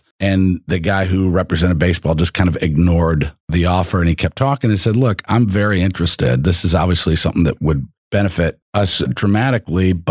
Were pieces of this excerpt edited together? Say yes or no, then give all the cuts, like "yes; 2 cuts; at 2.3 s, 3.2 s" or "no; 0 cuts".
no; 0 cuts